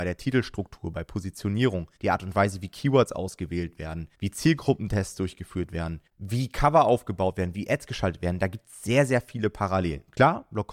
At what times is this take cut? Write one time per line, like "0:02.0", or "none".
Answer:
0:02.0
0:04.1
0:06.1